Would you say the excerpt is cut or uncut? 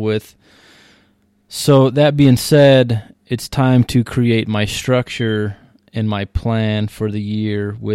uncut